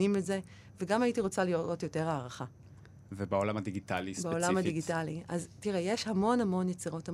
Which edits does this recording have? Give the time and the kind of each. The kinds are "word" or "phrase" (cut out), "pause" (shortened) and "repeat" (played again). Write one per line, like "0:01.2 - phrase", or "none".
none